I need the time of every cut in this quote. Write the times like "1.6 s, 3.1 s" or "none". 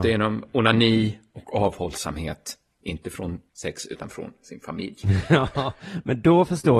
3.5 s